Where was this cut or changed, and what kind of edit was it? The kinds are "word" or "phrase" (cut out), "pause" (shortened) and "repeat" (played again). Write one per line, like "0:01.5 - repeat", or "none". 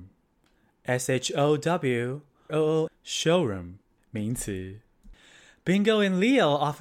0:02.5 - word
0:02.9 - word